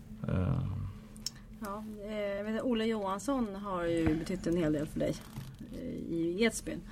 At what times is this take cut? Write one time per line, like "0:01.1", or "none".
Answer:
none